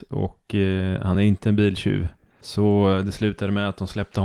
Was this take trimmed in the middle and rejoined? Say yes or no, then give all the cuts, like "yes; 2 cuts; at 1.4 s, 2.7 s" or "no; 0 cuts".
no; 0 cuts